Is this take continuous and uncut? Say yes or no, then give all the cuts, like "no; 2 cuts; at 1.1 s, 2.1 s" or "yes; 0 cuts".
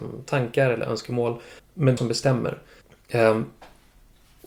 no; 3 cuts; at 1.6 s, 2.0 s, 2.8 s